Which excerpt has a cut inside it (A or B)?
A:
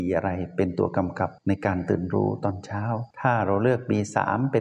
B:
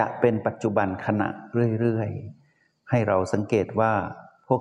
A